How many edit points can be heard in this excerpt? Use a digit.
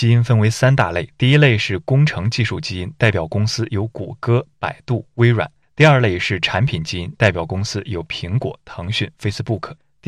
0